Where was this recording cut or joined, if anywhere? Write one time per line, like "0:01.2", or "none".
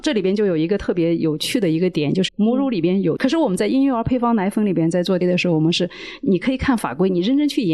0:02.3
0:03.2
0:05.2